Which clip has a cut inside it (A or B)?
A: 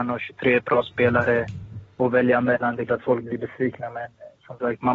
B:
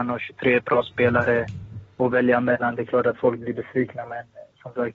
A